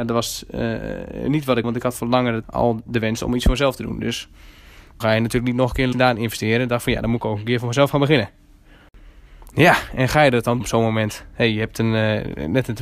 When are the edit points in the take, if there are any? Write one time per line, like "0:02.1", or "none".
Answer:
0:01.6
0:02.4
0:05.0
0:05.9
0:10.6